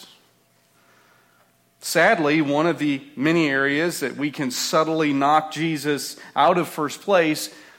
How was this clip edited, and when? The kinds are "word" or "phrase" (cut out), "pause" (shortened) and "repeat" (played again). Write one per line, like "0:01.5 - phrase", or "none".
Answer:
none